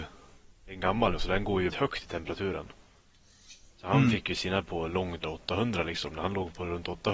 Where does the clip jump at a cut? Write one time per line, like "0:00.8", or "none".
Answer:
0:01.1
0:01.7
0:04.6
0:05.2

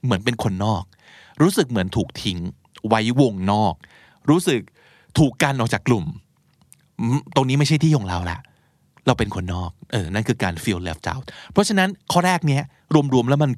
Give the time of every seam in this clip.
0:12.0

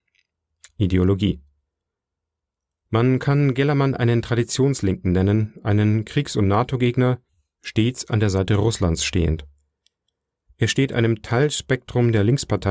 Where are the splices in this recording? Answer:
none

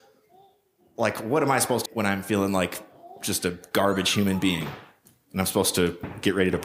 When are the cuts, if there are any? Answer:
0:01.9

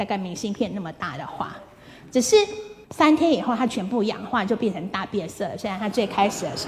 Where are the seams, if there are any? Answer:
0:02.8

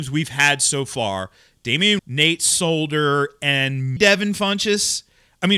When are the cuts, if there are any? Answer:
0:02.0
0:04.0

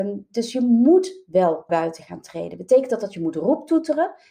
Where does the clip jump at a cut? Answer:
0:01.7

